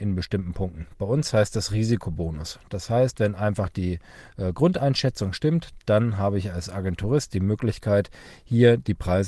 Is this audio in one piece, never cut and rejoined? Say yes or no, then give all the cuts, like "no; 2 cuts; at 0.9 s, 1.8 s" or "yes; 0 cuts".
yes; 0 cuts